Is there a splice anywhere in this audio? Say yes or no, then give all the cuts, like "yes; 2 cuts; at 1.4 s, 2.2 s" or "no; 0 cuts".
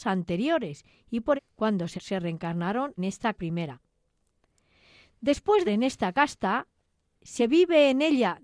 yes; 6 cuts; at 1.4 s, 2.0 s, 3.0 s, 3.3 s, 5.7 s, 7.4 s